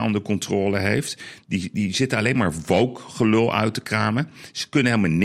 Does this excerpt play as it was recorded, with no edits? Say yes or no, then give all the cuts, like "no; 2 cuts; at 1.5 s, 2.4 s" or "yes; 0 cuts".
yes; 0 cuts